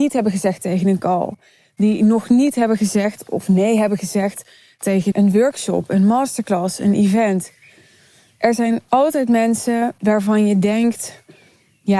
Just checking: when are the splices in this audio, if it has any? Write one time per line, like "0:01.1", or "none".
0:05.1